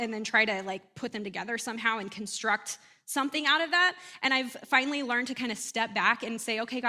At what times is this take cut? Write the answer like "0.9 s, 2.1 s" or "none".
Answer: none